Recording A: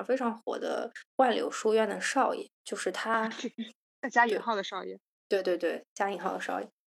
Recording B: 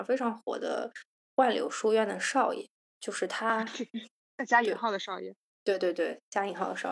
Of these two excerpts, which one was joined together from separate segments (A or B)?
A